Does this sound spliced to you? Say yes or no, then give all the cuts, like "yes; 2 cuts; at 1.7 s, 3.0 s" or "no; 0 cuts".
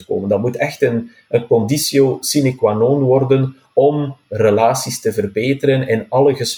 no; 0 cuts